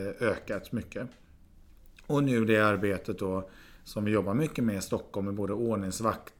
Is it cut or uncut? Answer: uncut